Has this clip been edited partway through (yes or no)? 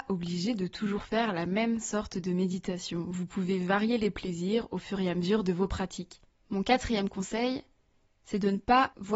yes